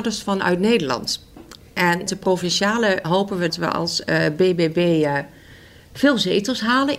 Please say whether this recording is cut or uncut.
cut